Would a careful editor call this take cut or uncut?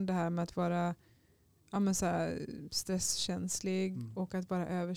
uncut